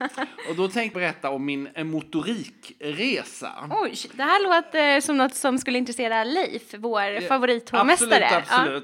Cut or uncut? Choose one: cut